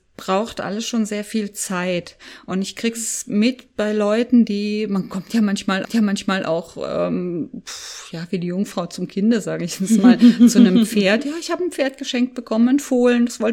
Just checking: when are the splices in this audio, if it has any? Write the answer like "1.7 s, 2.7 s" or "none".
5.8 s